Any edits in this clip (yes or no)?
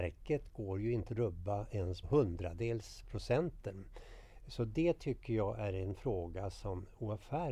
yes